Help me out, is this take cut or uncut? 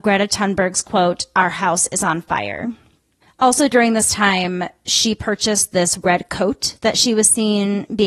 uncut